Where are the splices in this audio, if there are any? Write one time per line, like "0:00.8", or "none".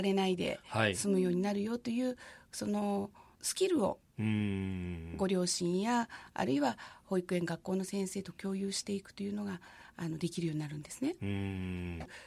0:03.3